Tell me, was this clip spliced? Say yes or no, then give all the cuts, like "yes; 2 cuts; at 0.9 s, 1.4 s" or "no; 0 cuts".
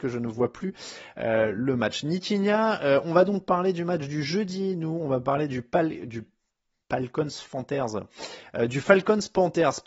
no; 0 cuts